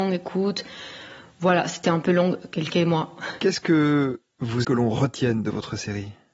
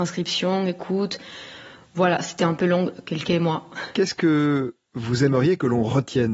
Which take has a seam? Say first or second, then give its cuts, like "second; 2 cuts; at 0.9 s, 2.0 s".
first; 1 cut; at 4.6 s